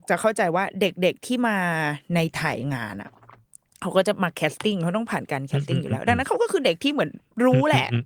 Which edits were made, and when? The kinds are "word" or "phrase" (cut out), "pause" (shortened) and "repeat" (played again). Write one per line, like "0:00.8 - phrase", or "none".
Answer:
none